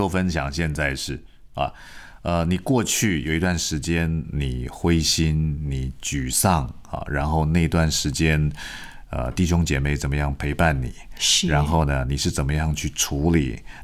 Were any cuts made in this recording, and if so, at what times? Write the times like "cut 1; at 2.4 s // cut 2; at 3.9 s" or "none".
none